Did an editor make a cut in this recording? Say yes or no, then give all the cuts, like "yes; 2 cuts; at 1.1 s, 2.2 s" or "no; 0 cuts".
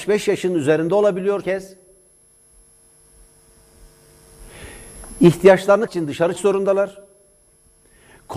yes; 3 cuts; at 1.4 s, 5.9 s, 6.4 s